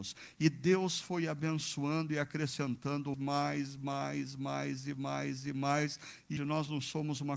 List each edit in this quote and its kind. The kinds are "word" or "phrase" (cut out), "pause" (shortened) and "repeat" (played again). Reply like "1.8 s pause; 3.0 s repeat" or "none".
3.1 s word; 4.9 s repeat; 6.4 s word